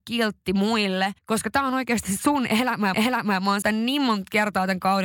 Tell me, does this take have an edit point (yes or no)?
yes